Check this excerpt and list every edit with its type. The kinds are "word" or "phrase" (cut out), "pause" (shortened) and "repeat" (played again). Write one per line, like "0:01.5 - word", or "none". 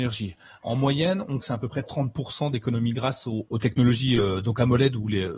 0:01.4 - word
0:02.9 - word
0:03.5 - word

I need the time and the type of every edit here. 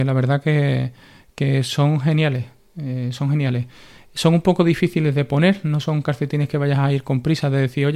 none

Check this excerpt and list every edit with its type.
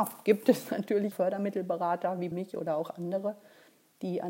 0:01.1 - word
0:02.3 - word

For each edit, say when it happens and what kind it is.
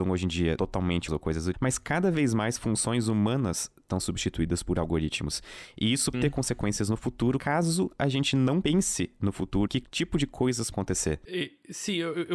0:01.1 - word
0:01.5 - word
0:04.0 - word
0:06.1 - word
0:09.7 - word
0:10.7 - word

